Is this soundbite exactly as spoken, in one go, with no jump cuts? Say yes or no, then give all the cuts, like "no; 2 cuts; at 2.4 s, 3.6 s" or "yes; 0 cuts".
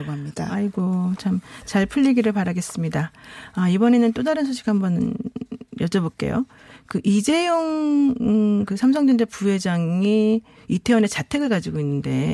yes; 0 cuts